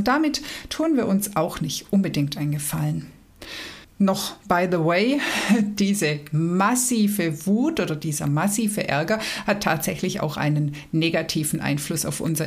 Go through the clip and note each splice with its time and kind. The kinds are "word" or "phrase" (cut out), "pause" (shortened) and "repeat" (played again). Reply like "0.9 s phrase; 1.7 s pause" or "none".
3.8 s pause